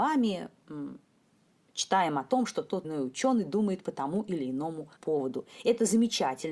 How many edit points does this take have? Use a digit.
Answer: 2